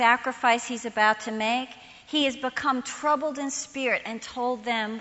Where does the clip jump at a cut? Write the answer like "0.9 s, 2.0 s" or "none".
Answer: none